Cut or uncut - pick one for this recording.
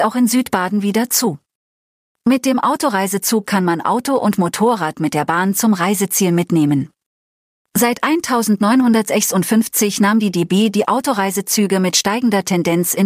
uncut